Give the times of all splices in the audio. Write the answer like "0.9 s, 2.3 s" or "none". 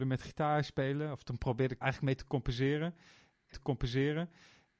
1.8 s, 3.5 s